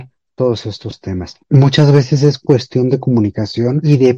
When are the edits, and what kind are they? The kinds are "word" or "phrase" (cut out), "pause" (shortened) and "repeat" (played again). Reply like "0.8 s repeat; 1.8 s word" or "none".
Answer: none

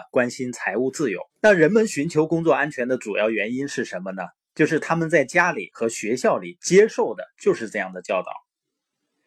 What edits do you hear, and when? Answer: 1.3 s pause

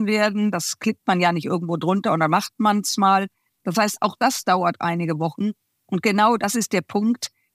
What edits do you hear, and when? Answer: none

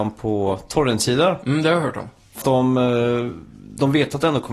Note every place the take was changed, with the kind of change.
2.4 s word

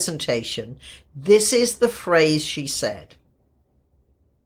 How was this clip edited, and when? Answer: none

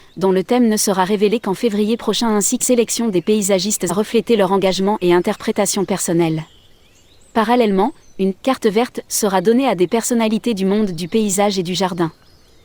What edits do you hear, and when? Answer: 2.6 s word; 3.9 s word

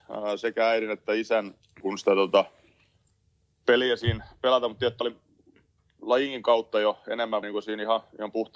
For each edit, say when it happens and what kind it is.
1.8 s word; 5.0 s word; 7.4 s word

